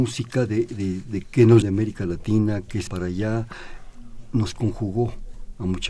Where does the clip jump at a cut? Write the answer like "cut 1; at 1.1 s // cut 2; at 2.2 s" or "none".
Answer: cut 1; at 1.2 s // cut 2; at 1.6 s // cut 3; at 2.9 s